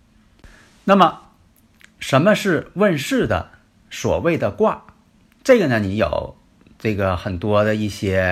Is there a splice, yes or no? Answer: no